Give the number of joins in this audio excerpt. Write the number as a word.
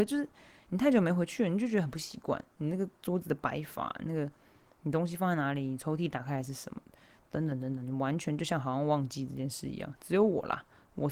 zero